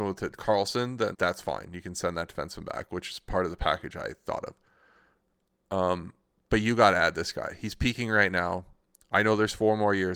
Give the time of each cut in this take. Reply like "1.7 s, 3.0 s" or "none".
1.1 s